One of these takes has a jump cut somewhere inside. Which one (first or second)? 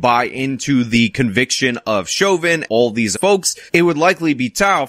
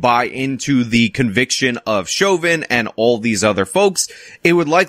first